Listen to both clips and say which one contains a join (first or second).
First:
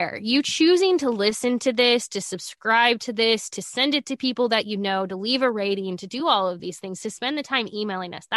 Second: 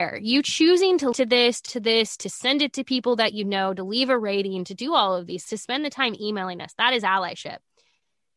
second